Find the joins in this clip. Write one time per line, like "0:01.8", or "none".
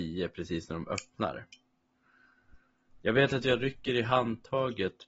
none